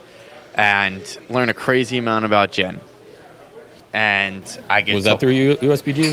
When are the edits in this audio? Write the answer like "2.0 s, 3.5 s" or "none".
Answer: 3.8 s